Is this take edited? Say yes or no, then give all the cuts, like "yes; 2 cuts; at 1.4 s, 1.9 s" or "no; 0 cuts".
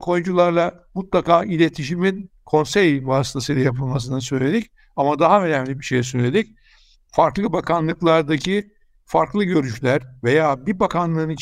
no; 0 cuts